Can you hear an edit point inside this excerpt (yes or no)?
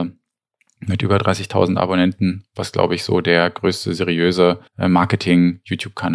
yes